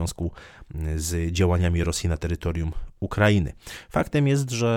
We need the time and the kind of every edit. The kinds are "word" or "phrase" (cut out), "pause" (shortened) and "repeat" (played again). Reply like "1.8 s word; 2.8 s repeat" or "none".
none